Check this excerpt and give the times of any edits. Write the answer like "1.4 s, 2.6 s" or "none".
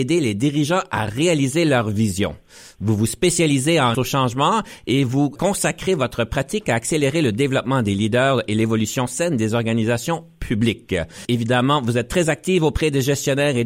3.9 s